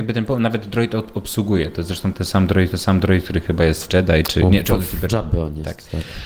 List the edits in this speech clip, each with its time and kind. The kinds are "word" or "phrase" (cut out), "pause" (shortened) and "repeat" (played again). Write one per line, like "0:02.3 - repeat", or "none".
0:02.7 - repeat
0:03.9 - word
0:05.1 - word